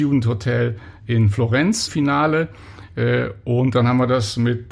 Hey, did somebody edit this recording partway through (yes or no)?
yes